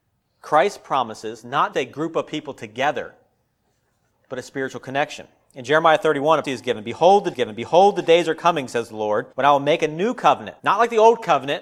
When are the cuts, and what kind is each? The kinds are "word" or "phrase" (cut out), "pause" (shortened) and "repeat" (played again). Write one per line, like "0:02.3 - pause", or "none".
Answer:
0:01.7 - word
0:06.4 - word
0:07.3 - repeat
0:09.3 - pause
0:10.6 - pause